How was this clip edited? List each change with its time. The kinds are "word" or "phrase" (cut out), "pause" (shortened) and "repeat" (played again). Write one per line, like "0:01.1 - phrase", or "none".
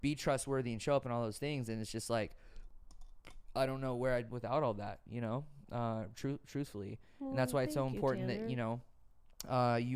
0:04.3 - word

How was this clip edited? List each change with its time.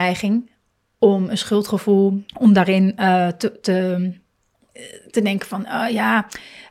0:02.3 - pause

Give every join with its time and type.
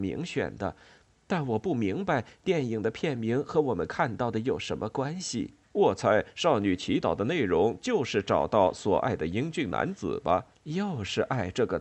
0:05.6 - pause
0:10.5 - pause

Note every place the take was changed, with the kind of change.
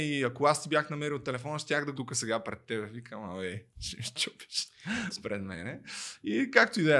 0:01.9 - word
0:03.7 - pause

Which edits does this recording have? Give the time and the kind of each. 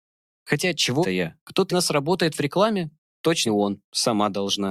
0:01.0 - word
0:01.7 - word
0:03.5 - word

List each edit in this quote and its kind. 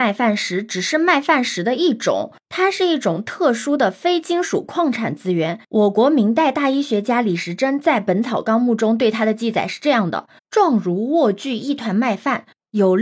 0:05.7 - pause
0:10.4 - pause

